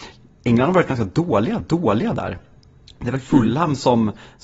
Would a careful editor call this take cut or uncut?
cut